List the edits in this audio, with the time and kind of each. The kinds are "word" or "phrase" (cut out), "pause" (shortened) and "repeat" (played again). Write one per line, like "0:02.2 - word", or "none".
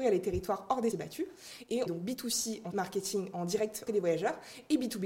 0:00.9 - word
0:01.9 - phrase
0:02.7 - word
0:03.3 - word
0:03.9 - word